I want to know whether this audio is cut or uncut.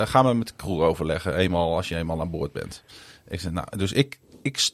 uncut